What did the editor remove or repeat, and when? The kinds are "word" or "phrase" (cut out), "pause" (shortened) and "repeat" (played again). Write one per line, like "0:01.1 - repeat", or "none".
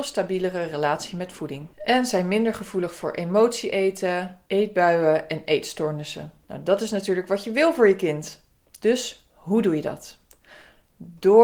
none